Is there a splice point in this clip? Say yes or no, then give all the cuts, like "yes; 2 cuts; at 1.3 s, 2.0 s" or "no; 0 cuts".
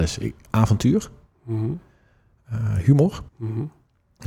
yes; 1 cut; at 3.3 s